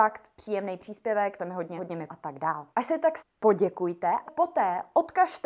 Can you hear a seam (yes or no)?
yes